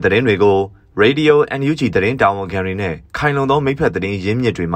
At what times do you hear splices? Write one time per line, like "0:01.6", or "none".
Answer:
0:03.1